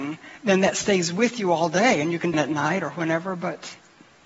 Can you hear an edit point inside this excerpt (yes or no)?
yes